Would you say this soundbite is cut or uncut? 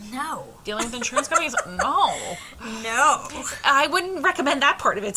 uncut